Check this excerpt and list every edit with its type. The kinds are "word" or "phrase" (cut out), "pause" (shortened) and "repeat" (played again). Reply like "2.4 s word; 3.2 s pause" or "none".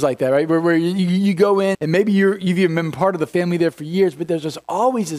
1.7 s word